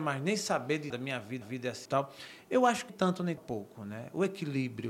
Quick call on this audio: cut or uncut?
cut